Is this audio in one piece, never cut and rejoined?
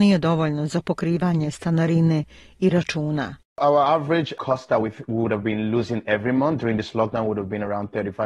yes; 0 cuts

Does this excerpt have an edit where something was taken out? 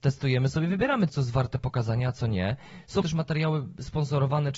yes; 2 cuts; at 1.1 s, 3.0 s

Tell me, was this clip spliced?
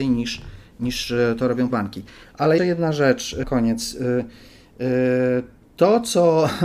yes; 3 cuts; at 1.7 s, 2.6 s, 3.4 s

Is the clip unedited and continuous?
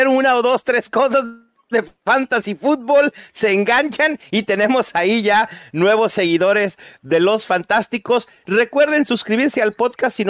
yes; 0 cuts

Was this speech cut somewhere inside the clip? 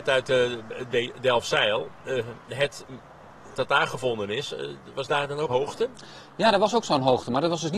yes; 2 cuts; at 3.5 s, 5.5 s

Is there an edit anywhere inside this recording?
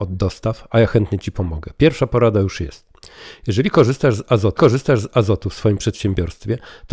yes; 1 cut; at 4.6 s

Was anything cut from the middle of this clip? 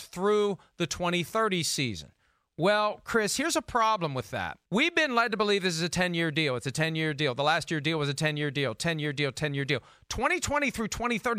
yes; 1 cut; at 4.6 s

